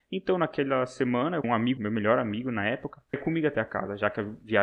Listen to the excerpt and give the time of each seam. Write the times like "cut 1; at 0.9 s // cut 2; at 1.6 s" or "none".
cut 1; at 1.4 s // cut 2; at 1.8 s // cut 3; at 3.1 s